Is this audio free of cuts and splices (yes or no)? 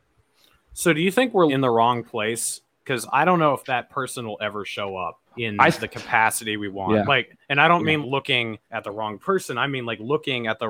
no